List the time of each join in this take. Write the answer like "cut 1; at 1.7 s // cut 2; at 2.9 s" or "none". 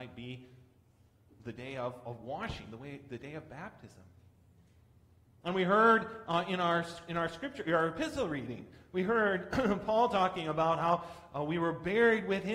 none